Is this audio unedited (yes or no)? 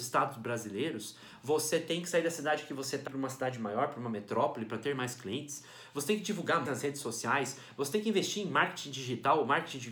no